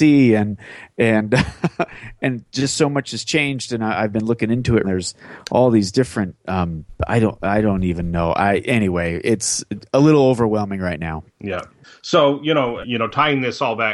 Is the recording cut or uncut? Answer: cut